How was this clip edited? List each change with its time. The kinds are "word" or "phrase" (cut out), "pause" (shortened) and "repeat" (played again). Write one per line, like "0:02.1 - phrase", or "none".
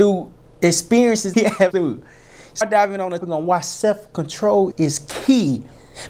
0:01.3 - word
0:01.7 - word
0:02.6 - word
0:03.2 - word
0:04.7 - word